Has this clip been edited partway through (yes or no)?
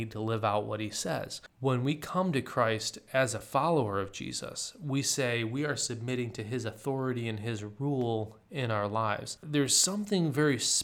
no